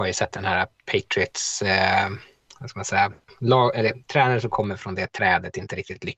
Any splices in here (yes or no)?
no